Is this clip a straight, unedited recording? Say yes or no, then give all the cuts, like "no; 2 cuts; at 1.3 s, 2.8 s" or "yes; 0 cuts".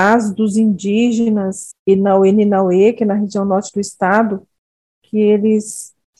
yes; 0 cuts